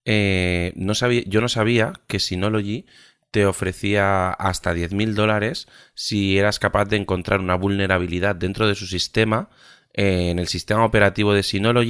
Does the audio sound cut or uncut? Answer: uncut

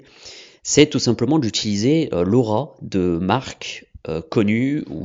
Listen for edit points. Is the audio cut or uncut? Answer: uncut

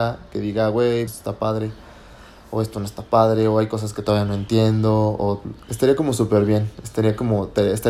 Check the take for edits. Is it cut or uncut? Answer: cut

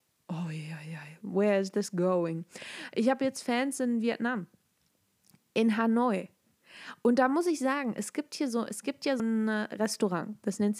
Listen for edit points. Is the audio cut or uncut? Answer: cut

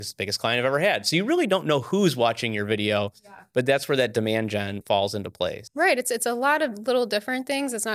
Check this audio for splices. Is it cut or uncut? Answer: cut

